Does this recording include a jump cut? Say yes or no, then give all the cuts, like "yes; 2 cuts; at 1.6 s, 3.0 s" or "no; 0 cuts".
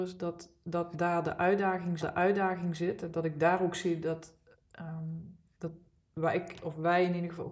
yes; 1 cut; at 2.0 s